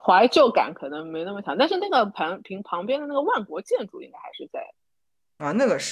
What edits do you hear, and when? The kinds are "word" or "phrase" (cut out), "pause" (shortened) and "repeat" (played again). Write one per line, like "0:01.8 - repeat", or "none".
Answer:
none